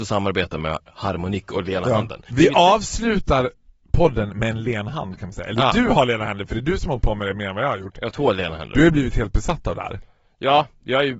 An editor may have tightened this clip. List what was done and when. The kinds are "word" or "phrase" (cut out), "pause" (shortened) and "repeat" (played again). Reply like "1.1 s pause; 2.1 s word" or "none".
none